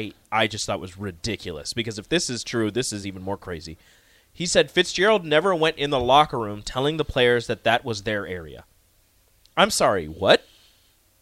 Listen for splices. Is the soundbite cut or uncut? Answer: uncut